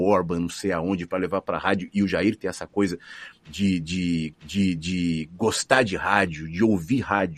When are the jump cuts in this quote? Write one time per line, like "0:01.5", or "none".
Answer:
0:04.3